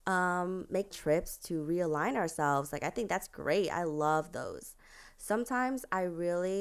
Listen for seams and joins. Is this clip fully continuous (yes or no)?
no